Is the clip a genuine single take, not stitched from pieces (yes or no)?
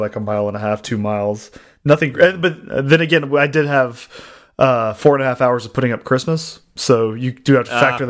yes